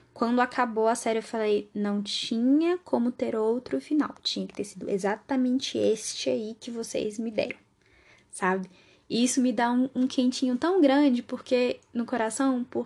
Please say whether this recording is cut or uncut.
uncut